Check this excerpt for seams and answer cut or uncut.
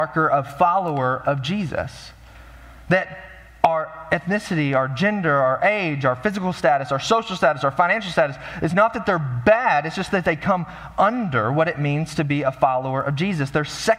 uncut